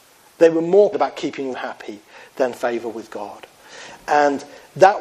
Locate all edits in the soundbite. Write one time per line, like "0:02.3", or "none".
0:00.9
0:01.5
0:02.5